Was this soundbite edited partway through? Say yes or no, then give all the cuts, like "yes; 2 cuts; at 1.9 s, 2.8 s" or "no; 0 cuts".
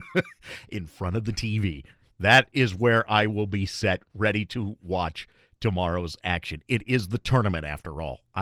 no; 0 cuts